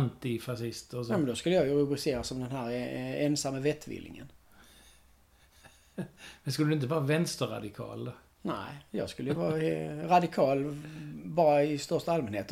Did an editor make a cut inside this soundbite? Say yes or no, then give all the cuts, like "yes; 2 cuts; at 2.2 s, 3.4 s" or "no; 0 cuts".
no; 0 cuts